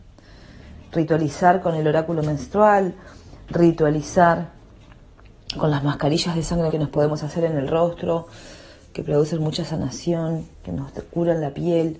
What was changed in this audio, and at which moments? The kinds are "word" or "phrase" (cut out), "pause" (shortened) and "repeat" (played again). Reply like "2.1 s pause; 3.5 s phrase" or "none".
6.7 s word; 10.5 s pause